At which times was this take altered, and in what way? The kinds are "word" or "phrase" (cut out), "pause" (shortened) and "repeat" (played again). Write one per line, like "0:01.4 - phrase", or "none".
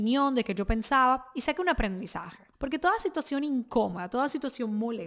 0:02.5 - pause